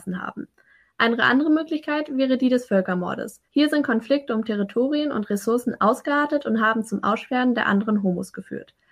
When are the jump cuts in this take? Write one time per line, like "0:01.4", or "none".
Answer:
0:03.4